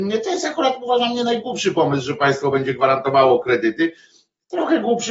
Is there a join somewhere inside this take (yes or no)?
no